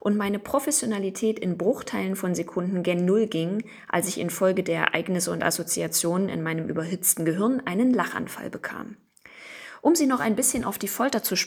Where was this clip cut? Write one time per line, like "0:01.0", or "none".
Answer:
none